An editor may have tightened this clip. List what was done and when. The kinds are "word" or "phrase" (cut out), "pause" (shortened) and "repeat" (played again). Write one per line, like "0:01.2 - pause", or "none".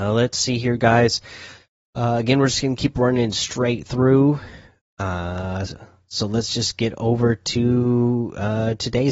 none